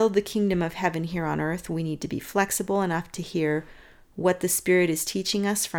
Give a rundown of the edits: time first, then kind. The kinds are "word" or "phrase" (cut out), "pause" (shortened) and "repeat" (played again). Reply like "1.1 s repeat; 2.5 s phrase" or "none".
none